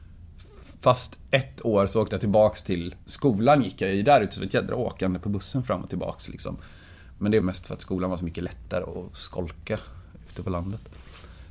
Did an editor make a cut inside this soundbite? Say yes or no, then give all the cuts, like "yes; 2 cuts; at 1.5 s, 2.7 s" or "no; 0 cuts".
yes; 2 cuts; at 3.0 s, 7.4 s